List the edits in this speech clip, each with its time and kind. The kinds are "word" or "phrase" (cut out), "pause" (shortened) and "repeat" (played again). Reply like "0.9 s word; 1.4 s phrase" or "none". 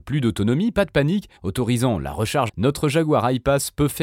1.4 s pause; 2.5 s word